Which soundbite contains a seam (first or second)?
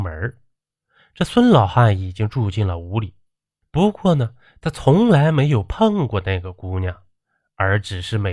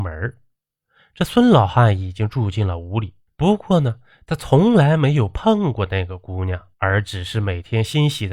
second